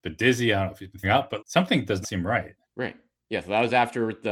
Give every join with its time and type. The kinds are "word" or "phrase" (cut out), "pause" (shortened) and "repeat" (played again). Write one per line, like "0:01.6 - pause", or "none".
0:01.0 - word
0:01.4 - word
0:02.0 - word
0:02.6 - pause